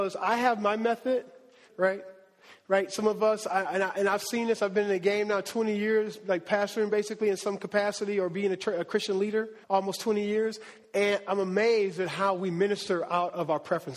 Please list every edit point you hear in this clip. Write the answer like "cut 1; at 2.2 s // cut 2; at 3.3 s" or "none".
cut 1; at 1.7 s // cut 2; at 9.6 s